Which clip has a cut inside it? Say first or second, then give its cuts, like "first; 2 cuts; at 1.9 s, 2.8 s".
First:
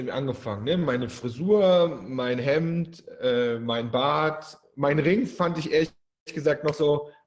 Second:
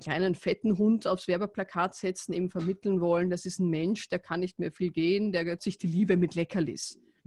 second; 1 cut; at 5.6 s